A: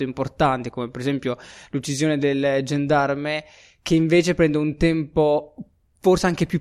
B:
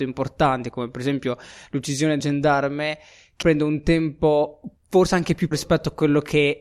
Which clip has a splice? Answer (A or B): B